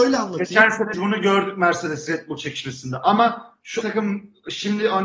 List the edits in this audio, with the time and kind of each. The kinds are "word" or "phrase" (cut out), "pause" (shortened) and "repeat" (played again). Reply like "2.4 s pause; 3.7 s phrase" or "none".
0.9 s word; 3.8 s word